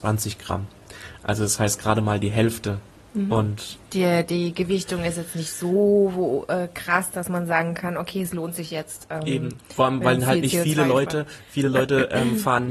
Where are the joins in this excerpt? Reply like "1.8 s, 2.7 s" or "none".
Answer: 3.8 s

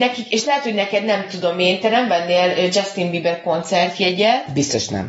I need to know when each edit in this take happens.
none

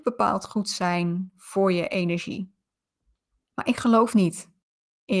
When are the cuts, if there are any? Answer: none

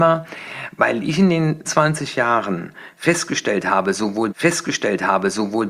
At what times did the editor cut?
1.6 s, 4.3 s

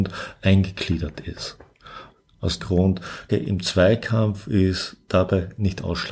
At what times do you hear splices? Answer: 2.6 s, 3.3 s

